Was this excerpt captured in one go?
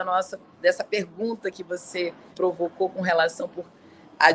no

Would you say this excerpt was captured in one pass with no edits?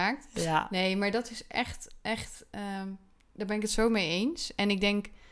yes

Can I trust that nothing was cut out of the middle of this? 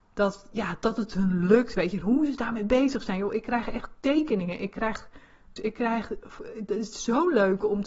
no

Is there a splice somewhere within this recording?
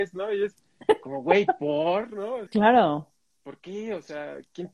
yes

